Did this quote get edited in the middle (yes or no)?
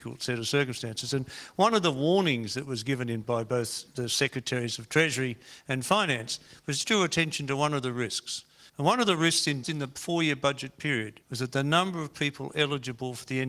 yes